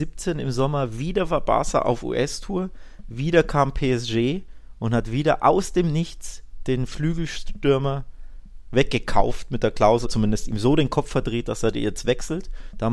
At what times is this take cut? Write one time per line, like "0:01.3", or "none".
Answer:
0:10.0